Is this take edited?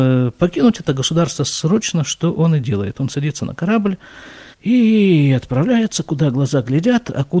yes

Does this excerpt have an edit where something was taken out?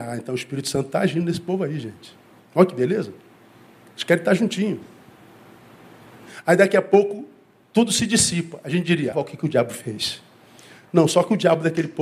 yes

